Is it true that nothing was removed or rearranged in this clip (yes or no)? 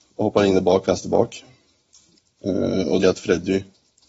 no